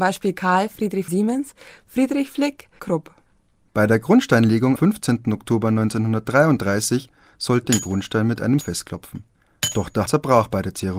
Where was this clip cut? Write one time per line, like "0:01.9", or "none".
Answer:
0:01.1
0:02.8
0:04.8
0:07.6
0:08.6
0:10.1